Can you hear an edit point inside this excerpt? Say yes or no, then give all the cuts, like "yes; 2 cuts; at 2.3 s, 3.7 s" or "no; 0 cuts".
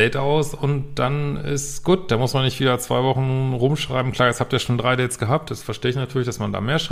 no; 0 cuts